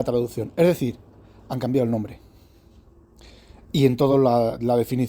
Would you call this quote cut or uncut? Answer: uncut